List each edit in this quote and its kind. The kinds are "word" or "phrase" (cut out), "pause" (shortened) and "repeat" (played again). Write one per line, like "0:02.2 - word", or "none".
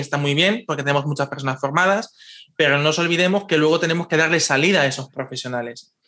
none